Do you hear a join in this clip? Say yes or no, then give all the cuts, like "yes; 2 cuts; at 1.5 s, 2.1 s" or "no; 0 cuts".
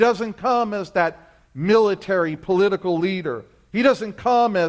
no; 0 cuts